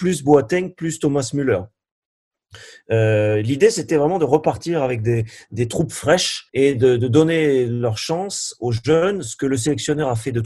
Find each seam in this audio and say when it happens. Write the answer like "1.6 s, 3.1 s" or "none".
6.5 s

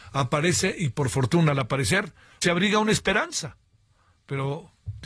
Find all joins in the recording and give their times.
2.4 s

